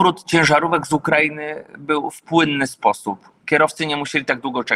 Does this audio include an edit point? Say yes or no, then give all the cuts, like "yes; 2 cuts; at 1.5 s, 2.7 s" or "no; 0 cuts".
no; 0 cuts